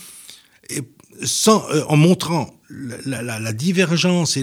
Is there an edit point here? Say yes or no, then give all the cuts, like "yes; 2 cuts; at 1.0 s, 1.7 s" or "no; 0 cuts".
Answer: no; 0 cuts